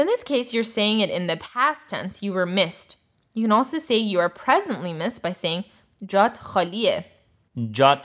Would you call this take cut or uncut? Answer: uncut